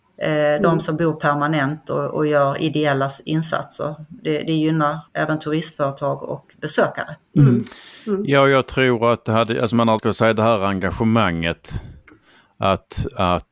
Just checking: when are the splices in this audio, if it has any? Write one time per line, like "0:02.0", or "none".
0:05.1
0:07.2
0:10.0